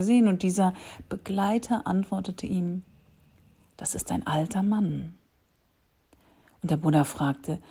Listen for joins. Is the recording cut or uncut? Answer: uncut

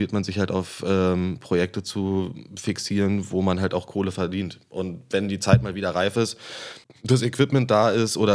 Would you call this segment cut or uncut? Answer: cut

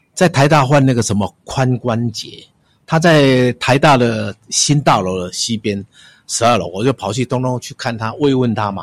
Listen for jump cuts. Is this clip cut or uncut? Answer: uncut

